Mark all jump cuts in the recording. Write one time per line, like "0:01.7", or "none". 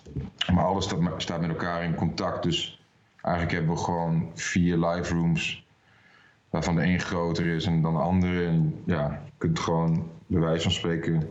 none